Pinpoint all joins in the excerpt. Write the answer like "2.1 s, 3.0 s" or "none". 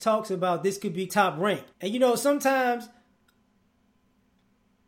1.1 s, 1.7 s